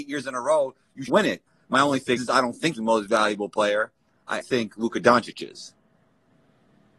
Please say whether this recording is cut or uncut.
cut